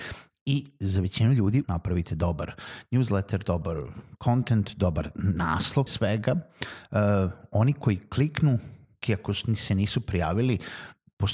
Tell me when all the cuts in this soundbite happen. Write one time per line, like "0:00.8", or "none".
0:01.6
0:05.9
0:09.0